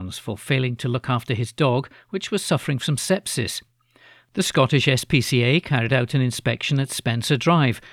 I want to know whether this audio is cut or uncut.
uncut